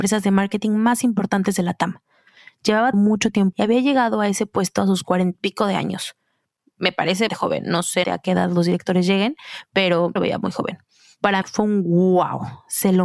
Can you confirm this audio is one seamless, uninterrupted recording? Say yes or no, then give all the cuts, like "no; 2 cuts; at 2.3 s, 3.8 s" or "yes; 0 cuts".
no; 7 cuts; at 2.9 s, 3.5 s, 5.3 s, 7.3 s, 8.0 s, 10.2 s, 11.4 s